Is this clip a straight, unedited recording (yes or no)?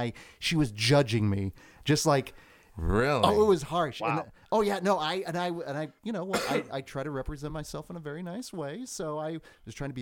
yes